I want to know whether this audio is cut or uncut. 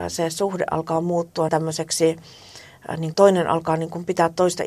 cut